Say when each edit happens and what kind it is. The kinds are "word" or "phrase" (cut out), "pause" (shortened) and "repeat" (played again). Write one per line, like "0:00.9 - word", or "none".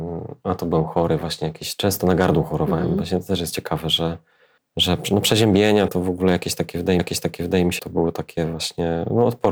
0:04.6 - pause
0:05.9 - word
0:07.0 - repeat
0:07.8 - word